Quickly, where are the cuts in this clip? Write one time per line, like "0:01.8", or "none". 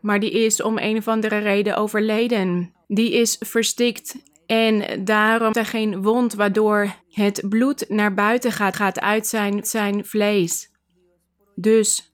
0:02.8
0:05.5
0:07.0
0:08.7
0:09.6